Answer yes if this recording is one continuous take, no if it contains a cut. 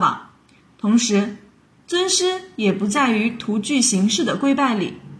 yes